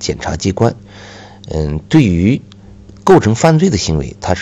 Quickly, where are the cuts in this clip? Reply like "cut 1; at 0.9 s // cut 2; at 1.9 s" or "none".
none